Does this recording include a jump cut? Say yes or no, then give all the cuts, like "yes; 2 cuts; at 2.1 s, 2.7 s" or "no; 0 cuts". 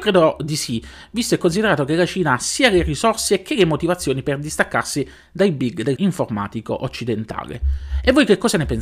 yes; 1 cut; at 6.0 s